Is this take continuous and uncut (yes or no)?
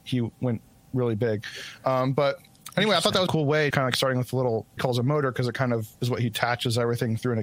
no